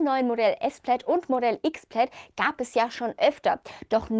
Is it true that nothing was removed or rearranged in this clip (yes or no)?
yes